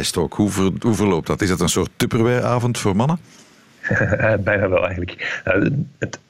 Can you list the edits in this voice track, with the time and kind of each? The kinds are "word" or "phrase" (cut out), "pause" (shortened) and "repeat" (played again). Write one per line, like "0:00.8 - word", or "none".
none